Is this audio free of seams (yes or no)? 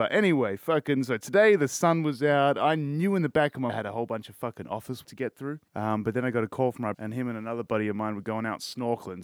no